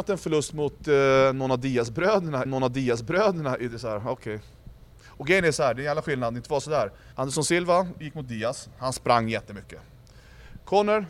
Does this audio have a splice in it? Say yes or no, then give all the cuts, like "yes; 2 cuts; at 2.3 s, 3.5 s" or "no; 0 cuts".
yes; 2 cuts; at 2.5 s, 7.1 s